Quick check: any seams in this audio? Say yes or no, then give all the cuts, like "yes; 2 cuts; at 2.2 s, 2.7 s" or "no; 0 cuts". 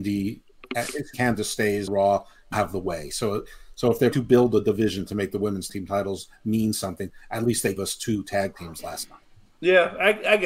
yes; 6 cuts; at 1.1 s, 1.9 s, 2.5 s, 4.1 s, 5.7 s, 7.8 s